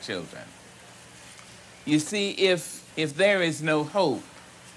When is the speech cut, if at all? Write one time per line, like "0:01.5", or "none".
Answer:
0:02.9